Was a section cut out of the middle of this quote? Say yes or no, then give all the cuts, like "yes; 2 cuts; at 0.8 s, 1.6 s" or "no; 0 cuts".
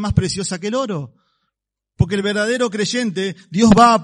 no; 0 cuts